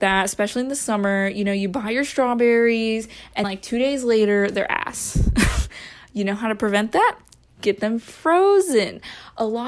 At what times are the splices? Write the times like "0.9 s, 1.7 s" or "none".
3.4 s